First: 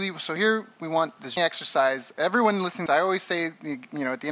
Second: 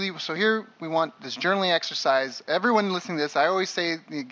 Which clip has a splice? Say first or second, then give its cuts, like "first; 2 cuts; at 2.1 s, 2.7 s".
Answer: first; 2 cuts; at 1.4 s, 2.9 s